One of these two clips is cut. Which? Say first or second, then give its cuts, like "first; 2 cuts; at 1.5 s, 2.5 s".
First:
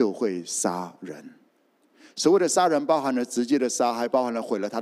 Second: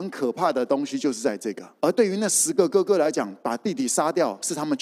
second; 1 cut; at 1.8 s